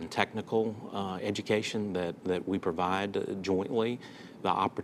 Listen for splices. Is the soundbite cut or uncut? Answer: uncut